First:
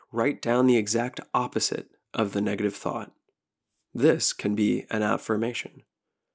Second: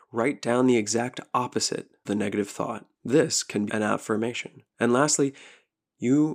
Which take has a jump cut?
second; 4 cuts; at 2.0 s, 2.9 s, 3.7 s, 4.7 s

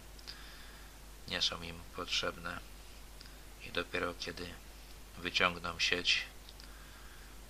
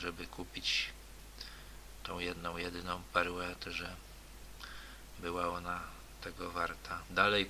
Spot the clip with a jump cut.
second; 1 cut; at 3.6 s

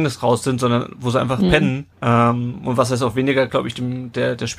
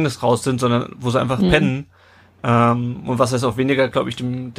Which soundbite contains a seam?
first; 1 cut; at 1.9 s

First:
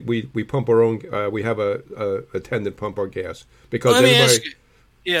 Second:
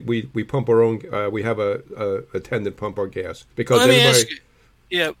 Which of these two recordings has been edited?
second; 1 cut; at 3.5 s

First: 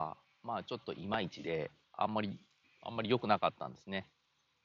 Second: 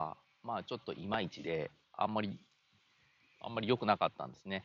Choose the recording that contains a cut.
first; 1 cut; at 2.6 s

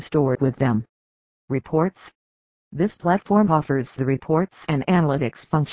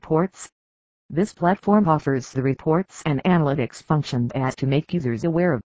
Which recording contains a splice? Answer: second; 1 cut; at 4.3 s

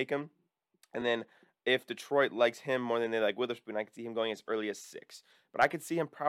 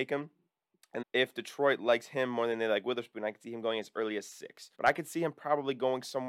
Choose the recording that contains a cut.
second; 2 cuts; at 1.0 s, 4.7 s

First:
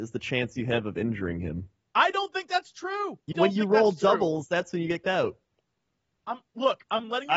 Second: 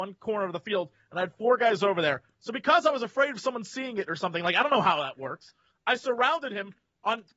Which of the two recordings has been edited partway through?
first; 2 cuts; at 3.3 s, 5.0 s

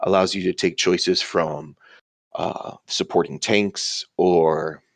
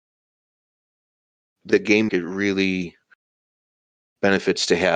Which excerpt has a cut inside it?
second; 2 cuts; at 1.7 s, 2.1 s

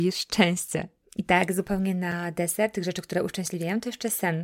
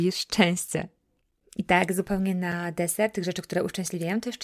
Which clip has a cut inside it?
first; 1 cut; at 1.0 s

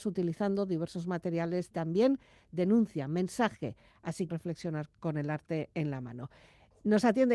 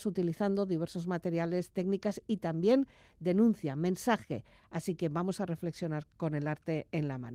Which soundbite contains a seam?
first; 2 cuts; at 1.7 s, 4.3 s

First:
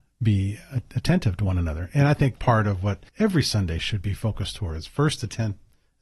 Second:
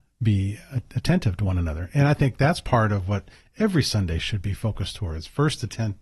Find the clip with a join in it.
first; 2 cuts; at 2.4 s, 3.1 s

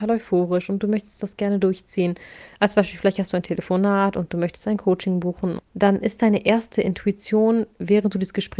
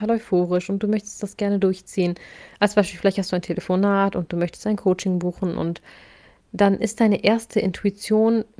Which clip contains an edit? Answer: first; 1 cut; at 5.6 s

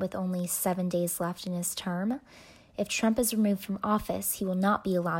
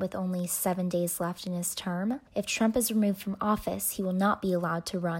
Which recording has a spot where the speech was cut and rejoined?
second; 1 cut; at 2.3 s

